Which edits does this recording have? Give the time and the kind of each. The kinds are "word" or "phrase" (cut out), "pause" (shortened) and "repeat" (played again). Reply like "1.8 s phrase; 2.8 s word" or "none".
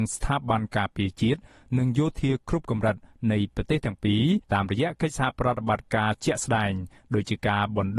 4.4 s pause